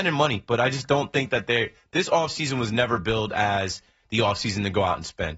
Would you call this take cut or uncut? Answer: uncut